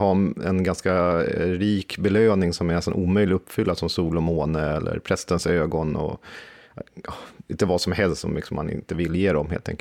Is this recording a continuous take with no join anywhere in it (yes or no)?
yes